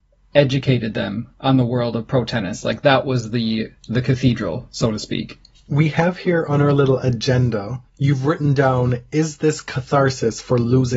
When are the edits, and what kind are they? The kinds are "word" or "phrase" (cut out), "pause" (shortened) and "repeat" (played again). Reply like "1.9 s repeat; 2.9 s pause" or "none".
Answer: 5.5 s pause; 7.9 s pause